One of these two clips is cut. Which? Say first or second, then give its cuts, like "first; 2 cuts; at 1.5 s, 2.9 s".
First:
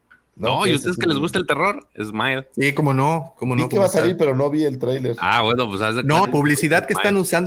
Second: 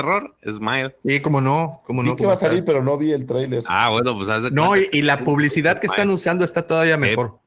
first; 1 cut; at 6.2 s